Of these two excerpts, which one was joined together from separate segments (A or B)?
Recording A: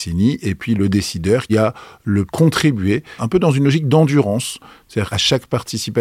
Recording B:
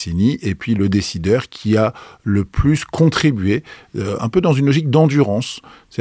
A